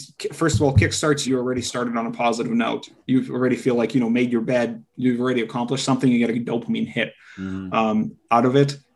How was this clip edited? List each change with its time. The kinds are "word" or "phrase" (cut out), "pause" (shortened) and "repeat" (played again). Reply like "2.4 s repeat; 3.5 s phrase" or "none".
1.2 s phrase

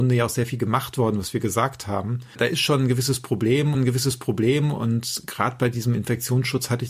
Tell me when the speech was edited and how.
3.7 s repeat

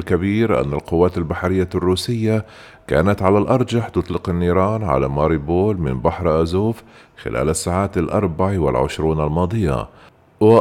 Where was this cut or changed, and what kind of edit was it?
none

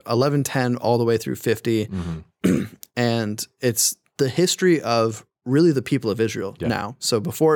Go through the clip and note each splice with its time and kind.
5.3 s pause

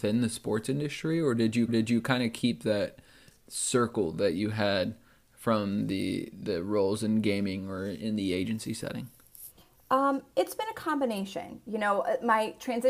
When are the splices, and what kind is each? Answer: 1.7 s repeat

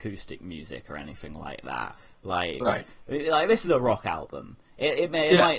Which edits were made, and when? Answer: none

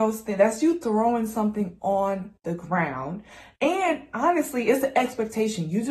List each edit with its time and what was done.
none

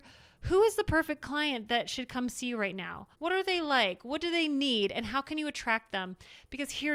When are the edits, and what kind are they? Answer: 3.1 s pause

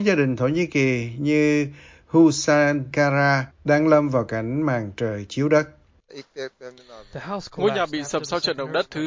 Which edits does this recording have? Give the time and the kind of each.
2.9 s word

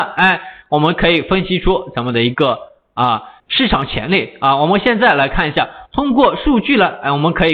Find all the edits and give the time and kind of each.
3.4 s pause

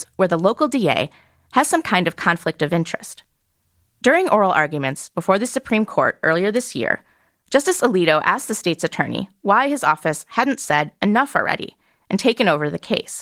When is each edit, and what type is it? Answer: none

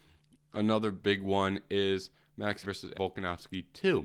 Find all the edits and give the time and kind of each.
2.6 s word; 2.9 s word

